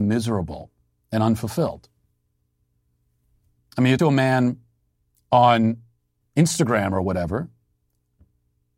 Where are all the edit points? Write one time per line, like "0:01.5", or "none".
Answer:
0:04.0
0:06.2